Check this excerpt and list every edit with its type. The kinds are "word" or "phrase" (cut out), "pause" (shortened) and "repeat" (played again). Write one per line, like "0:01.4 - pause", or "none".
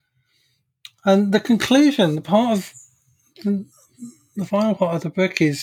none